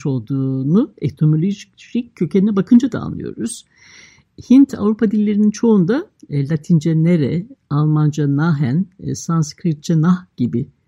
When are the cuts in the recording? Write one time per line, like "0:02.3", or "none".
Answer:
none